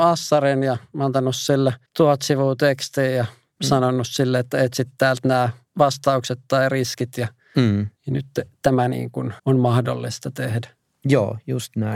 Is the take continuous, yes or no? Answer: no